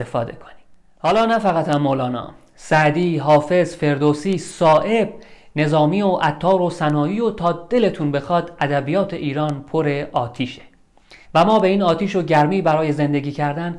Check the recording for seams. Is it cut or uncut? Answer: cut